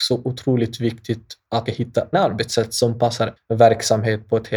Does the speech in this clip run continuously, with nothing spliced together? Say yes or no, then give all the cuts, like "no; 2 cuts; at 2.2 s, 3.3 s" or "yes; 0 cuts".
no; 3 cuts; at 1.7 s, 2.1 s, 3.4 s